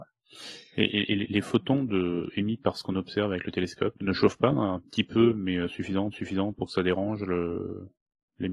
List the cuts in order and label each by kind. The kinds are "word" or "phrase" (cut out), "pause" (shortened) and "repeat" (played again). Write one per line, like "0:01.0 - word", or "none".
0:04.0 - word
0:06.1 - repeat